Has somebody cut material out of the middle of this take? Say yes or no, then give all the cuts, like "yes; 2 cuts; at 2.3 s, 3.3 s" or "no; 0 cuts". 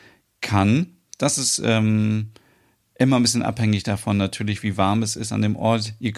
no; 0 cuts